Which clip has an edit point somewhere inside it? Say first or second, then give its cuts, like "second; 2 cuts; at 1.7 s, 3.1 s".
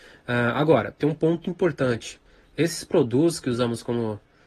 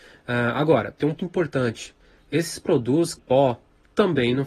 second; 2 cuts; at 1.2 s, 3.2 s